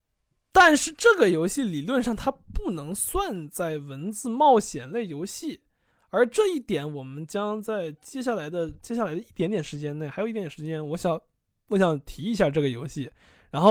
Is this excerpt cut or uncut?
uncut